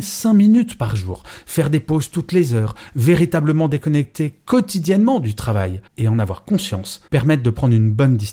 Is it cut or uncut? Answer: cut